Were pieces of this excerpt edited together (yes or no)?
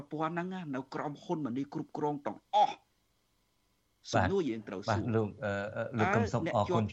no